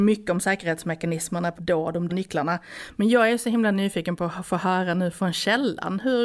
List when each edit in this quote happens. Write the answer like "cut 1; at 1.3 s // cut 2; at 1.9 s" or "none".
cut 1; at 1.6 s // cut 2; at 2.1 s